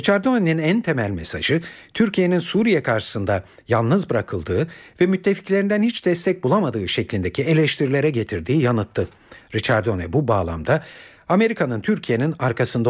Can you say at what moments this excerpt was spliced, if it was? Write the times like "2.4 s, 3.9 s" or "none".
none